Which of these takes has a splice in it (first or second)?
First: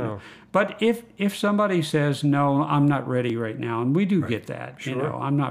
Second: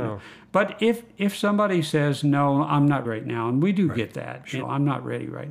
second